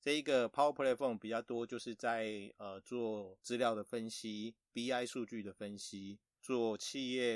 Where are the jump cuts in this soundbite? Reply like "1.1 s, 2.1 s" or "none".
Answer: none